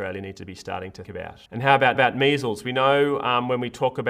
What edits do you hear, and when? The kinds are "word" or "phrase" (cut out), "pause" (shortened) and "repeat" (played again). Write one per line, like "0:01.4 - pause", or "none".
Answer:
0:01.0 - word
0:01.5 - pause
0:01.9 - repeat